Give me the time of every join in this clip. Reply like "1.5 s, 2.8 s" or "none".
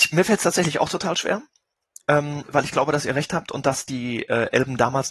none